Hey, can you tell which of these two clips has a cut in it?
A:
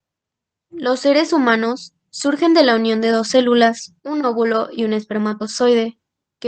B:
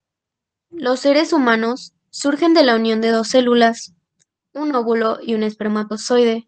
A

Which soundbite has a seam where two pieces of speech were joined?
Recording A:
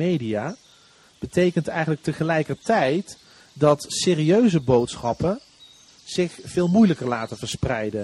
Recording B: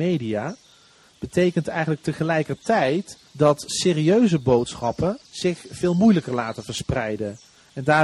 B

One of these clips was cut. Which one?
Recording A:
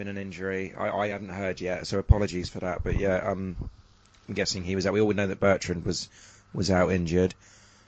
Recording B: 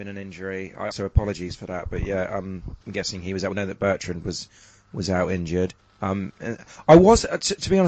B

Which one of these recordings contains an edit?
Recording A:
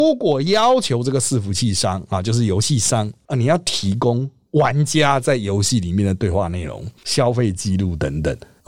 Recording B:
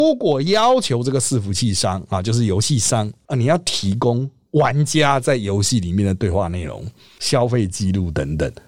A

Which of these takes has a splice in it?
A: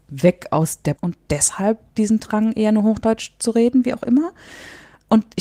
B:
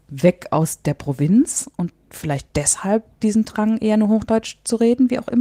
A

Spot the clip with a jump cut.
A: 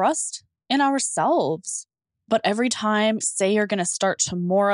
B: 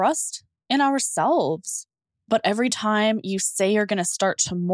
A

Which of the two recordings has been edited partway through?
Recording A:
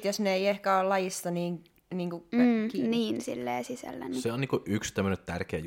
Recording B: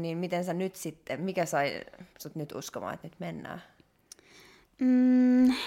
B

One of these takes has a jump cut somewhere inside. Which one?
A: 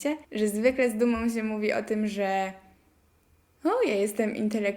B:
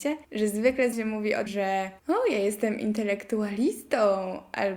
B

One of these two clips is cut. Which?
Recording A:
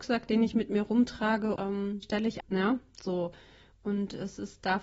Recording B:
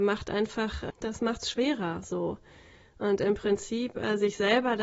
A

